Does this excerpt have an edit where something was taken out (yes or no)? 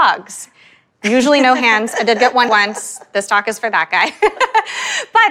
yes